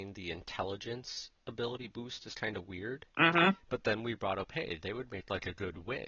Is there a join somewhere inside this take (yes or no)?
yes